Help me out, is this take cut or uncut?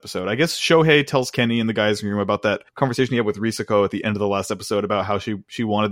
cut